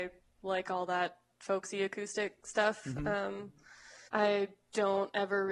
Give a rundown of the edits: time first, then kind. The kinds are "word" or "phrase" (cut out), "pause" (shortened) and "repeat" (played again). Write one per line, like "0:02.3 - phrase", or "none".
0:04.1 - pause